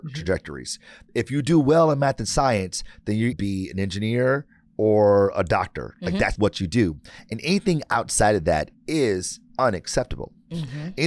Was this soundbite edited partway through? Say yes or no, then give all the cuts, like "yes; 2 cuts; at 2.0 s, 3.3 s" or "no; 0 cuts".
yes; 2 cuts; at 3.3 s, 6.4 s